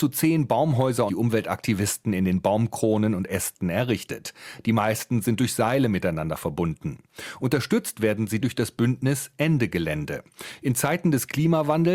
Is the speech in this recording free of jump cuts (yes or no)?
no